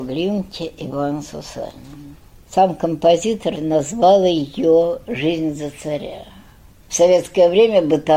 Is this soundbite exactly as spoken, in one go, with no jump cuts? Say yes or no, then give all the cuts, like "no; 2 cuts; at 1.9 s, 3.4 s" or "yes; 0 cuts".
yes; 0 cuts